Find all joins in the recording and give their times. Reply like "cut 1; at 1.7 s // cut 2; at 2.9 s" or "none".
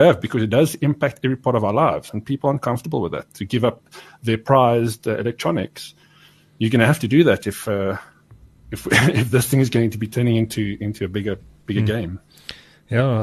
none